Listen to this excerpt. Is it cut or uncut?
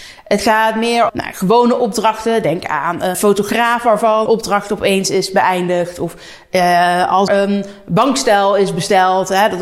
cut